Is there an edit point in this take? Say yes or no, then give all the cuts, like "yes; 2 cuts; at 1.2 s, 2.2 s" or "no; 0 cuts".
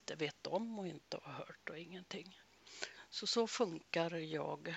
no; 0 cuts